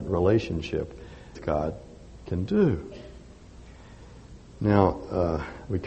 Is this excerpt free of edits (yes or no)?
no